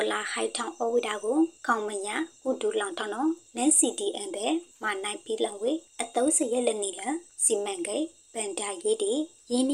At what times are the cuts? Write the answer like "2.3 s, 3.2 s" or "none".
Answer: 1.6 s